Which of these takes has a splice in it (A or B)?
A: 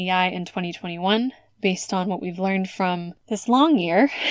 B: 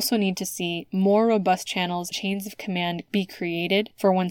B